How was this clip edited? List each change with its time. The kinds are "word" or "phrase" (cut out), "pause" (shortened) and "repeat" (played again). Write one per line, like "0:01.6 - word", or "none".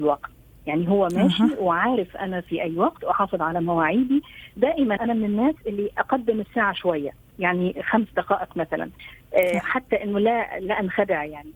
0:05.0 - word